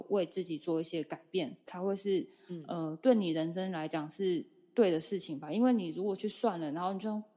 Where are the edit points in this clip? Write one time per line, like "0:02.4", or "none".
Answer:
0:01.6